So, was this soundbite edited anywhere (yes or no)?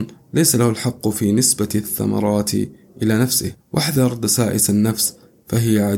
no